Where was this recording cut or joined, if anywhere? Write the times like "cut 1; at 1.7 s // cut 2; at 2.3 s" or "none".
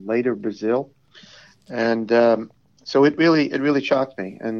none